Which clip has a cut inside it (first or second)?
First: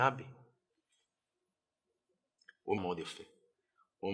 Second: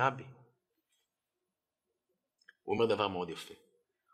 first